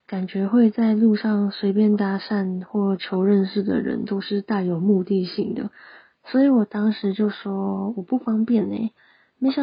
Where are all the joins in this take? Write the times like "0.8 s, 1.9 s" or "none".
none